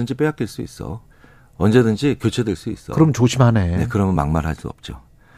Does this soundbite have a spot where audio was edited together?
no; 0 cuts

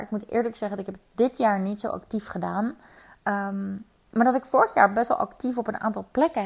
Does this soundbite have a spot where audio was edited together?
no; 0 cuts

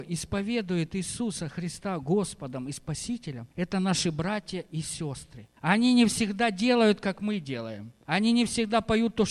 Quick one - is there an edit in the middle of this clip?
yes; 3 cuts; at 3.5 s, 5.6 s, 8.0 s

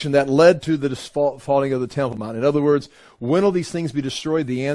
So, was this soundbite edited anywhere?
no; 0 cuts

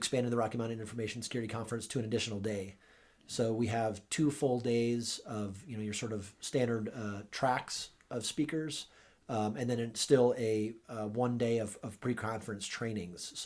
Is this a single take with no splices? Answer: yes; 0 cuts

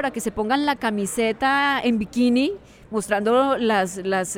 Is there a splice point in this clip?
no; 0 cuts

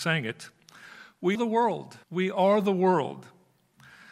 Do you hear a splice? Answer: yes; 2 cuts; at 1.3 s, 2.0 s

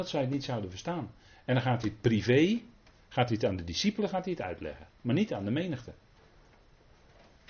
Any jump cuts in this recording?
no; 0 cuts

